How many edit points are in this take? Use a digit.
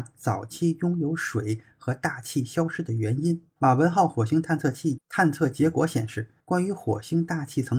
2